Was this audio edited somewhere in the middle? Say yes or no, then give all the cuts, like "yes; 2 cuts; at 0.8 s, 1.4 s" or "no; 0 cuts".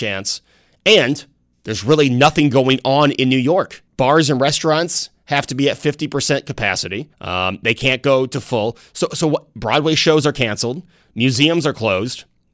yes; 2 cuts; at 3.9 s, 7.1 s